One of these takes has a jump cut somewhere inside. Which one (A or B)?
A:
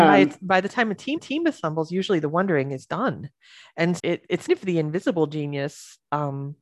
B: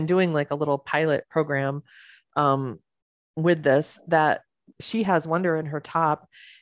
A